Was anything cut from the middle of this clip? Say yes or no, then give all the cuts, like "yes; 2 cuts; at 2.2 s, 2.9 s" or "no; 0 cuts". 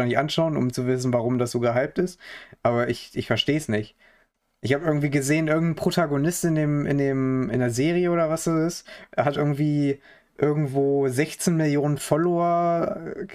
no; 0 cuts